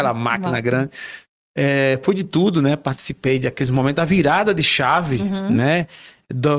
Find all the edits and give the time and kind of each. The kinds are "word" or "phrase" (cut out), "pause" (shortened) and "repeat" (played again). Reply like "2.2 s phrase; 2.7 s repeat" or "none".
none